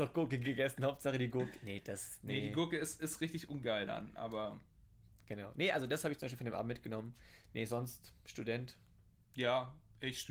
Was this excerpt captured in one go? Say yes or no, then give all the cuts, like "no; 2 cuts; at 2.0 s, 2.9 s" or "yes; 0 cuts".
yes; 0 cuts